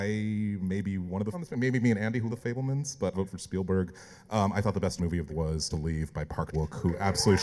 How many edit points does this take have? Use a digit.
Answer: 7